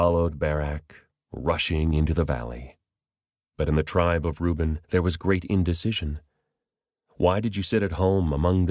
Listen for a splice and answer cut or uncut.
cut